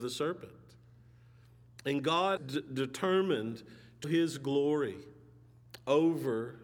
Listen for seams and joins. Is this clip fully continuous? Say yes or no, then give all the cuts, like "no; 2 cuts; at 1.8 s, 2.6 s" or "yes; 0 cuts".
no; 2 cuts; at 2.4 s, 4.0 s